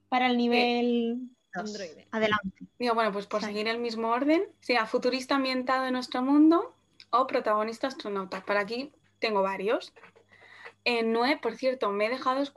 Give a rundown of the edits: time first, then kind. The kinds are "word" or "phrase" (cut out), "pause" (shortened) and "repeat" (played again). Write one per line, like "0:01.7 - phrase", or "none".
0:02.1 - pause
0:04.5 - pause
0:09.0 - pause